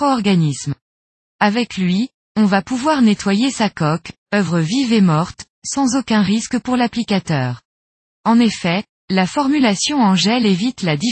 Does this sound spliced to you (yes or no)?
no